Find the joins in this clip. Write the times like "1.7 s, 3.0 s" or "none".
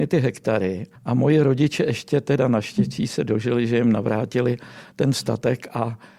1.0 s

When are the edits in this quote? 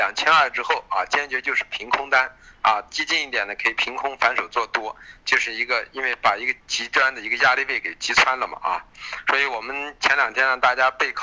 6.6 s

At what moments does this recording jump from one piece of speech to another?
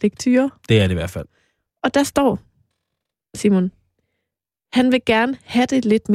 none

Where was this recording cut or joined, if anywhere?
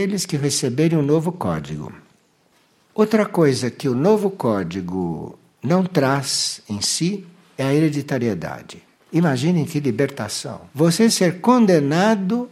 10.7 s

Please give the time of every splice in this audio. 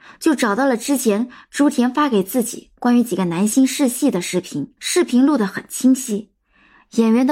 4.8 s

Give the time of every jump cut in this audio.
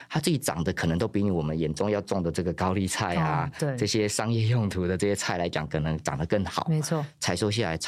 none

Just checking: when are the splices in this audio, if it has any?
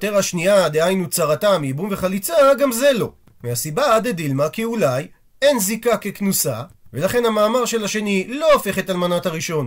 none

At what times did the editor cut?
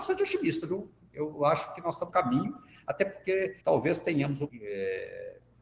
2.1 s, 3.6 s, 4.5 s

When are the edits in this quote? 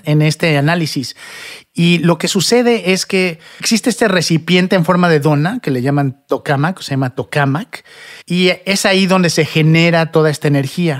8.2 s

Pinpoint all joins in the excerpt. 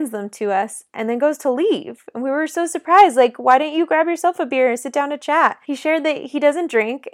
none

